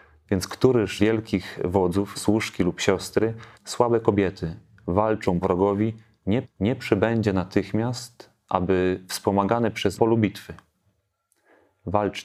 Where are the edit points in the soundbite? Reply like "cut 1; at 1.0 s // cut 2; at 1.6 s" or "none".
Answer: cut 1; at 1.0 s // cut 2; at 2.1 s // cut 3; at 3.5 s // cut 4; at 5.4 s // cut 5; at 6.4 s // cut 6; at 10.0 s

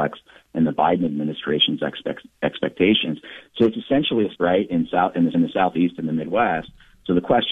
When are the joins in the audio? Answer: cut 1; at 4.4 s // cut 2; at 5.3 s

